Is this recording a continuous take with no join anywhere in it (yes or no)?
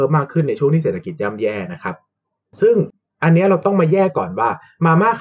yes